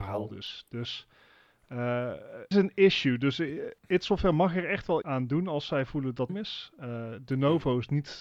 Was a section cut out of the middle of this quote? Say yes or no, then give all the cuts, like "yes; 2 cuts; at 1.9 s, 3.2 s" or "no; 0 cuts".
yes; 4 cuts; at 2.5 s, 3.8 s, 5.0 s, 6.3 s